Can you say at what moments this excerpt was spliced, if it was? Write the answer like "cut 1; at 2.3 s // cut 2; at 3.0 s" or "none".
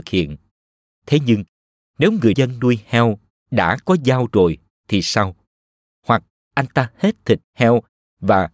cut 1; at 2.3 s